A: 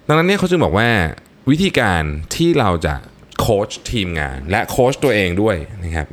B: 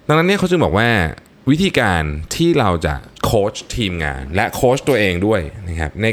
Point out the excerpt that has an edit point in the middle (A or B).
B